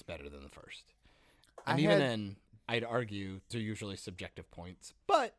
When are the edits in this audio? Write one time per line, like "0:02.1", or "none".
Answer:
0:03.5